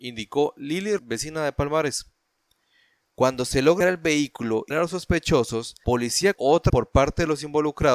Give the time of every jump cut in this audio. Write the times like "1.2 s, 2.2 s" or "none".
1.0 s, 3.8 s, 4.7 s, 5.8 s, 6.3 s, 6.7 s